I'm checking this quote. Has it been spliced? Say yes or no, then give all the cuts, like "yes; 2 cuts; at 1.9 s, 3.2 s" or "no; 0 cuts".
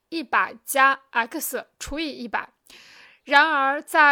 no; 0 cuts